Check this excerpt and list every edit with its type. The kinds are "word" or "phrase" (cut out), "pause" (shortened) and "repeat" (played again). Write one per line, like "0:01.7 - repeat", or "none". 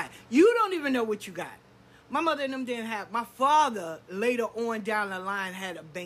none